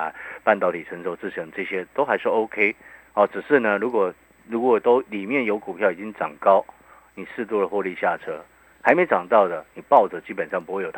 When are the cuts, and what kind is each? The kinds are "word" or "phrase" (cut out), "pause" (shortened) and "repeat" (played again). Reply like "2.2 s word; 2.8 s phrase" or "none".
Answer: none